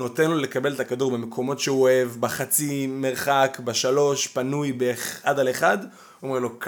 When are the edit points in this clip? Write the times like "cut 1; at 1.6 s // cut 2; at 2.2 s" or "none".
none